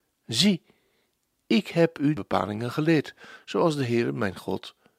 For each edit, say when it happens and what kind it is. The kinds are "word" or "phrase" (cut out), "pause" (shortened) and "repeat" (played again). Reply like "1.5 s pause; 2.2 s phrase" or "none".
2.2 s phrase